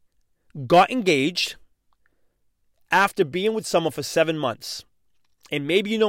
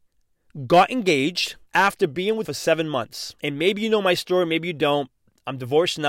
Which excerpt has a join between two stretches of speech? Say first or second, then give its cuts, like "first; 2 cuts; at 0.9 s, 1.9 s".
second; 3 cuts; at 1.7 s, 2.4 s, 3.4 s